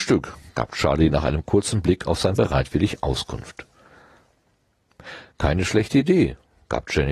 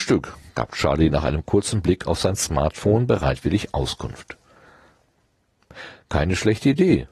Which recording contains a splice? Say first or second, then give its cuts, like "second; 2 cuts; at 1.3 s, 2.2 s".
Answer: first; 1 cut; at 2.4 s